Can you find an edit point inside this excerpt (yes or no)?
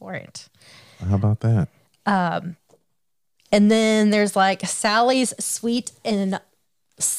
no